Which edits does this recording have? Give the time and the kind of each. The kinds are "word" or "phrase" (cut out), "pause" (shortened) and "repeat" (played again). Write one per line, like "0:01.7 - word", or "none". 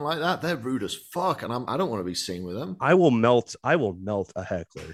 0:01.7 - word

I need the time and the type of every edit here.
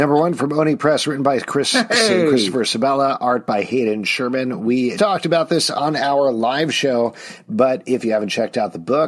0:05.0 - word

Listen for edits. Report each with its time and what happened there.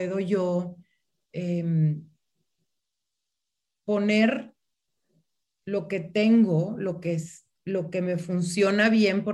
none

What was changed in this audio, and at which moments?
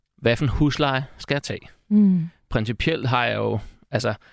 none

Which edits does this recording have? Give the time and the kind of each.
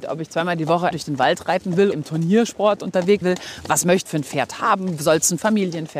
0:00.9 - word
0:01.9 - word
0:03.2 - word
0:04.1 - word

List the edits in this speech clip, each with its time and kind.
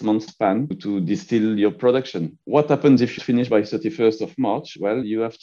0:03.2 - word

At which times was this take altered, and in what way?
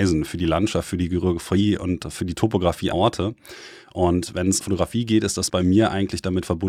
0:02.9 - word
0:04.6 - word
0:05.5 - word

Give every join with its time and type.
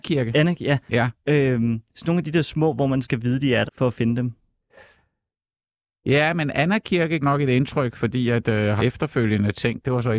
0:03.0 - word
0:03.7 - word
0:07.2 - word
0:08.8 - word

